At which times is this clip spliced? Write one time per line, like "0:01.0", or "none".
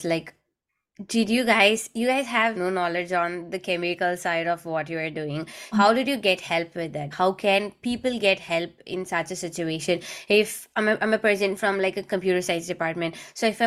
0:02.5
0:05.7
0:07.1